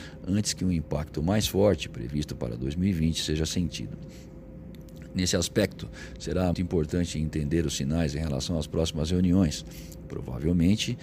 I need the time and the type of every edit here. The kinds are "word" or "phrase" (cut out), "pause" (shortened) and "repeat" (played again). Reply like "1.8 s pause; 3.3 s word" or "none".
6.5 s word